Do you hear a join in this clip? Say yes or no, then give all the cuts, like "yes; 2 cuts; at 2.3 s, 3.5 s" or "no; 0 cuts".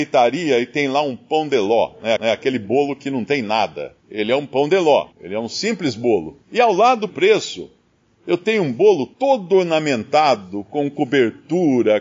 yes; 6 cuts; at 2.2 s, 4.0 s, 5.1 s, 6.4 s, 7.1 s, 9.1 s